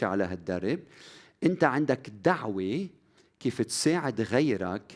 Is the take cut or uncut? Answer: uncut